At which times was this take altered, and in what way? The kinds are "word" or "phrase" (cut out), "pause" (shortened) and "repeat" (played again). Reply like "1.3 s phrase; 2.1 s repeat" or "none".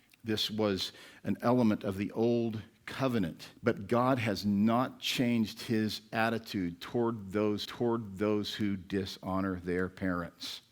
3.6 s pause; 7.7 s repeat